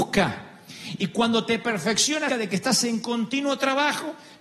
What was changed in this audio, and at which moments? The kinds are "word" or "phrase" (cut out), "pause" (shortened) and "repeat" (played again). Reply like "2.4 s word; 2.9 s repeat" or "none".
2.3 s word